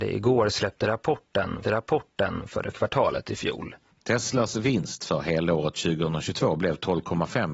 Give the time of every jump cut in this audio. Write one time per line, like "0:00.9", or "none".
0:01.6
0:02.7
0:03.9